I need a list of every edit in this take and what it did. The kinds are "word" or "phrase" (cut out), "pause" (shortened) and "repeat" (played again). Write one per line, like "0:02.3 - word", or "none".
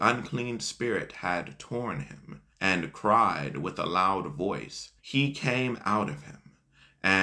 0:02.5 - pause
0:05.0 - pause